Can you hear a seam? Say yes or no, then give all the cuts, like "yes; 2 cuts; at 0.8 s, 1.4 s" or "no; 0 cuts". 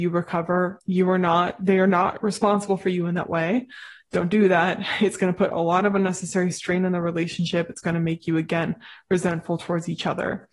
no; 0 cuts